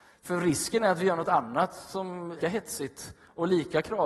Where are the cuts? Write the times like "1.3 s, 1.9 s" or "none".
2.4 s

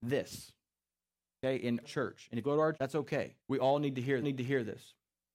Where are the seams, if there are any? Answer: 1.8 s, 2.4 s, 2.7 s, 3.4 s, 4.2 s

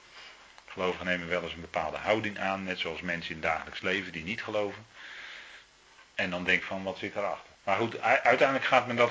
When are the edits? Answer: 6.1 s, 6.6 s, 7.5 s

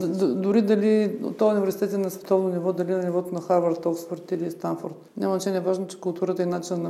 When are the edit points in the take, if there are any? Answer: 5.1 s

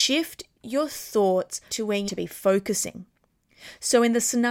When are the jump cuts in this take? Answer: 1.7 s, 2.1 s

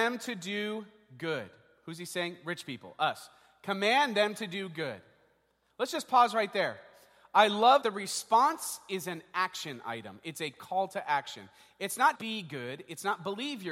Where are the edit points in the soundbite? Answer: 7.8 s, 12.2 s

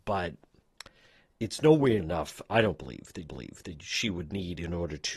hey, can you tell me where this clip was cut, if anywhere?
2.0 s, 3.3 s

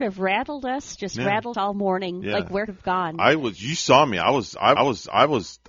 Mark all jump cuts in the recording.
1.5 s, 2.7 s, 4.8 s

